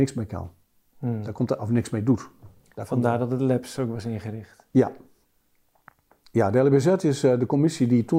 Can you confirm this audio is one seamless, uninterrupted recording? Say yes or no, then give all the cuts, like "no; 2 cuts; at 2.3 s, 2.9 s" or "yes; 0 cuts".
yes; 0 cuts